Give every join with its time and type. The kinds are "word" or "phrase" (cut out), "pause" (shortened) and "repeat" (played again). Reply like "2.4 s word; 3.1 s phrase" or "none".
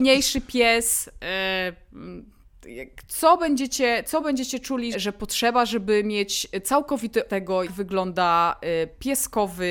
4.0 s word; 4.9 s word; 7.3 s word; 7.7 s word